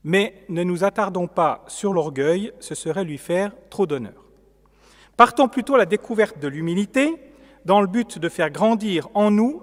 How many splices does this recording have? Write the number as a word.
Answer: zero